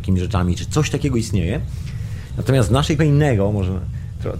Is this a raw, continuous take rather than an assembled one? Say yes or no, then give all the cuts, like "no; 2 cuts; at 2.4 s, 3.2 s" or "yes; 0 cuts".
no; 1 cut; at 3.0 s